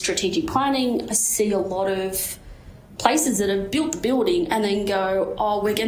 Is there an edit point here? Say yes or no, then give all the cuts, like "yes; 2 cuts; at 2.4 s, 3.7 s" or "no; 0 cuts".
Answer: no; 0 cuts